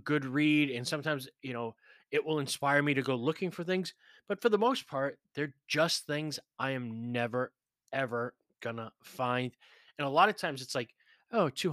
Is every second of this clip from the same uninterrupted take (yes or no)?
yes